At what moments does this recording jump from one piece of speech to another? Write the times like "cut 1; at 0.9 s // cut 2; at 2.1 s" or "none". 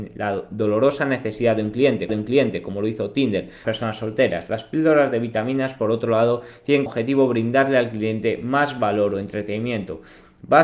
cut 1; at 2.1 s // cut 2; at 3.6 s // cut 3; at 6.9 s